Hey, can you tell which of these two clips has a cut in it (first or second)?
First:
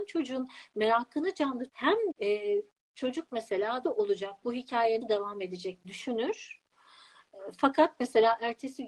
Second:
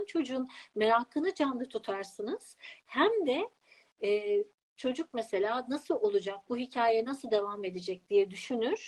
first